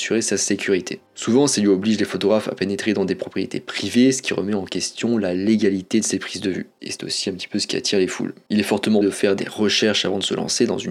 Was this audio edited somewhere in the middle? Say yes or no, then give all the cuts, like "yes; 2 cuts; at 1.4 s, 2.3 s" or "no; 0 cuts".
yes; 1 cut; at 9.0 s